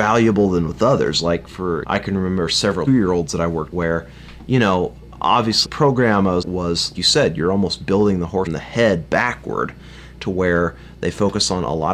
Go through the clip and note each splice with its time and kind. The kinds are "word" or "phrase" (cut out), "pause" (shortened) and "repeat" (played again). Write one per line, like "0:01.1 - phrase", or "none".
0:01.8 - word
0:02.9 - word
0:03.7 - word
0:05.6 - word
0:06.4 - word
0:06.9 - word
0:08.5 - word

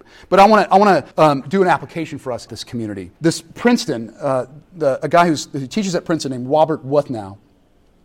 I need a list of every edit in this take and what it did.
0:01.1 - pause
0:02.5 - phrase
0:03.2 - pause

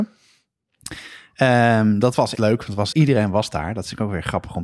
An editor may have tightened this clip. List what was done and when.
0:02.3 - word
0:02.9 - word

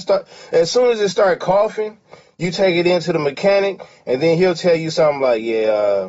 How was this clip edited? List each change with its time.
none

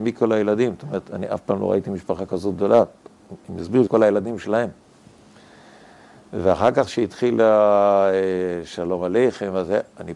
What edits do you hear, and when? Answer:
0:03.9 - word

